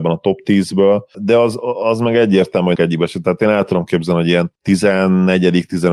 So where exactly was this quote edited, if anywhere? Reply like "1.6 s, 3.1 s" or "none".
2.7 s

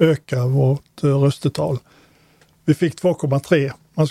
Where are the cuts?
none

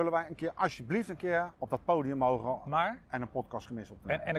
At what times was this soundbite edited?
1.5 s

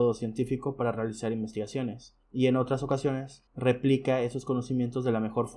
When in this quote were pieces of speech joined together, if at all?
2.2 s, 3.5 s

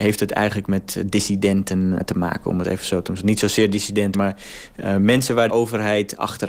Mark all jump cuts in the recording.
2.0 s, 4.1 s, 5.5 s

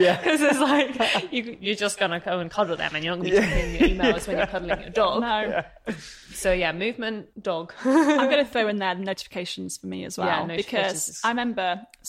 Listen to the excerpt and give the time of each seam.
7.3 s

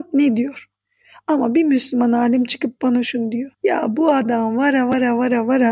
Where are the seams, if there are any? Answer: 3.5 s

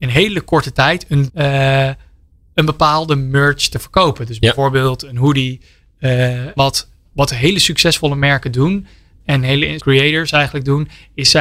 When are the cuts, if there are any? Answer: 1.3 s, 6.6 s, 9.2 s, 9.8 s

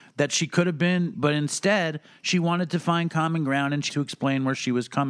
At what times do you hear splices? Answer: 1.1 s, 3.9 s

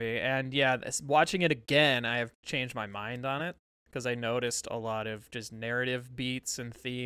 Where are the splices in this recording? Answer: none

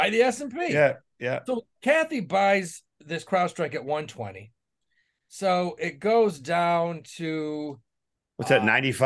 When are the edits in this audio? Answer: none

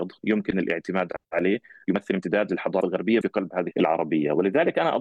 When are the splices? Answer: 1.2 s, 2.8 s, 3.2 s, 3.7 s

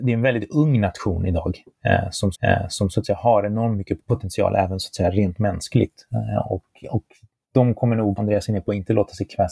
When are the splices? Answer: 2.3 s, 4.0 s, 8.2 s

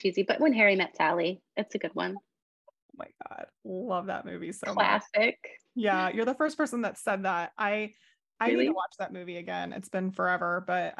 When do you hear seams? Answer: none

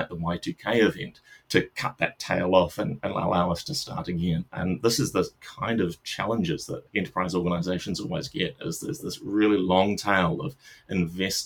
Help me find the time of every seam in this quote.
4.5 s, 6.9 s

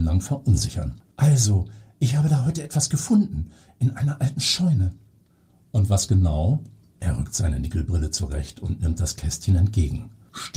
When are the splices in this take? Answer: 1.1 s

